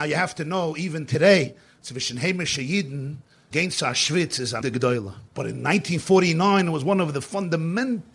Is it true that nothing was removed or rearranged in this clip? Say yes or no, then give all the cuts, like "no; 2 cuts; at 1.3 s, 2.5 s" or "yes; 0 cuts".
no; 3 cuts; at 3.5 s, 4.6 s, 5.3 s